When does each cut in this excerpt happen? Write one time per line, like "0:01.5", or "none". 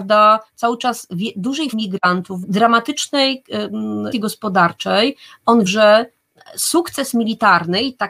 0:01.7
0:02.4
0:04.1
0:05.7